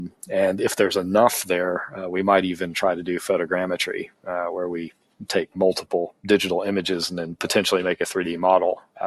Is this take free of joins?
yes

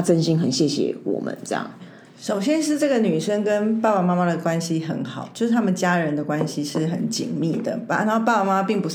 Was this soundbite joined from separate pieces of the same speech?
no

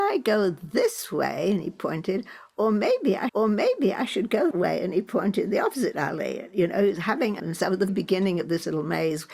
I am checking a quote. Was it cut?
yes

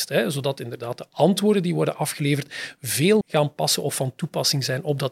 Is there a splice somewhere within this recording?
yes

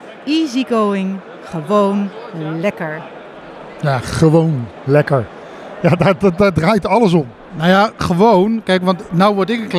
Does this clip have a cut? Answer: no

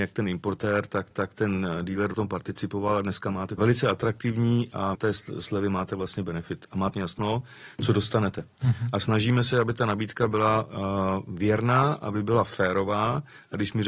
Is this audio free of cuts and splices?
no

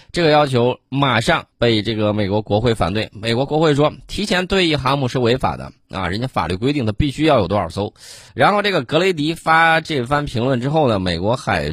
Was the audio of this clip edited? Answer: yes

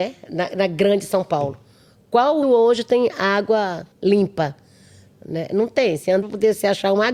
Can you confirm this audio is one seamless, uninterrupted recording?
no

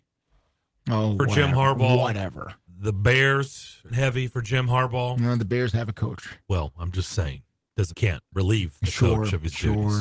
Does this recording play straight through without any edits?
no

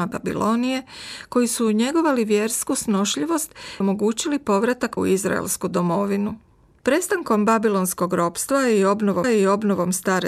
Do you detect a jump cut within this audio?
yes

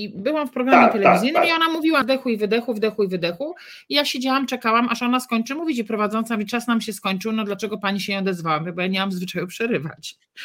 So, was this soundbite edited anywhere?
yes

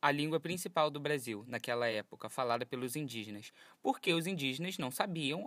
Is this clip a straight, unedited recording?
yes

